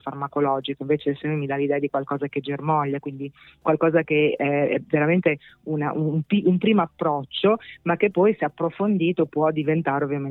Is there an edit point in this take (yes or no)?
no